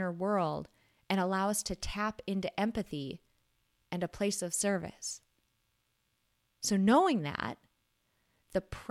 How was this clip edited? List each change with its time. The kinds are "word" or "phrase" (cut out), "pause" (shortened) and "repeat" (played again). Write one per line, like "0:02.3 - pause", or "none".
none